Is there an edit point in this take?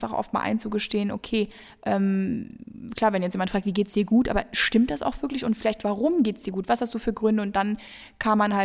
no; 0 cuts

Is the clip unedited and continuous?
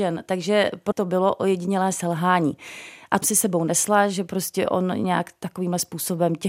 no; 2 cuts; at 0.9 s, 3.2 s

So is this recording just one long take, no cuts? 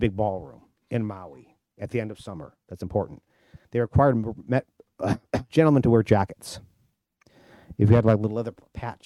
no; 1 cut; at 3.6 s

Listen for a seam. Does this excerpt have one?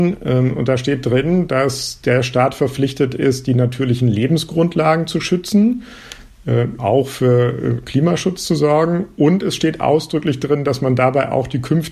yes; 1 cut; at 6.8 s

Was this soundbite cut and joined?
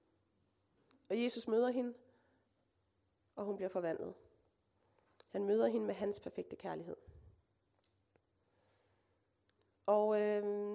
no; 0 cuts

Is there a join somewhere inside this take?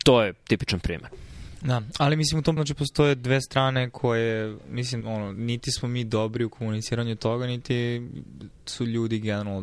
yes; 2 cuts; at 2.6 s, 5.0 s

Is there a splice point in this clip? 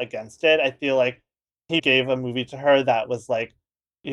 yes; 1 cut; at 1.8 s

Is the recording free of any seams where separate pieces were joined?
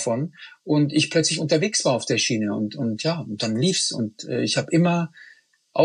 yes; 0 cuts

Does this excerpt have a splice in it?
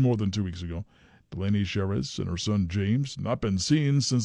no; 0 cuts

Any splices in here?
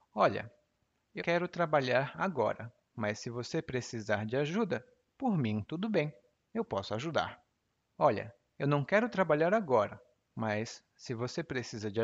yes; 1 cut; at 1.2 s

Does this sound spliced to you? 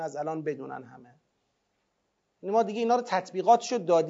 no; 0 cuts

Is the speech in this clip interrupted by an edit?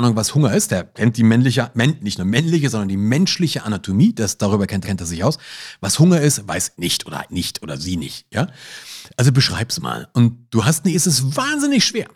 yes; 4 cuts; at 4.8 s, 6.7 s, 7.3 s, 10.9 s

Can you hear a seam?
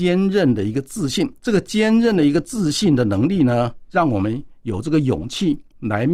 yes; 1 cut; at 1.4 s

